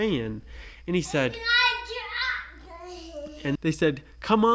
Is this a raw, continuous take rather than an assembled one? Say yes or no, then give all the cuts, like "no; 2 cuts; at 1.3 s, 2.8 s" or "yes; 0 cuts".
no; 1 cut; at 3.6 s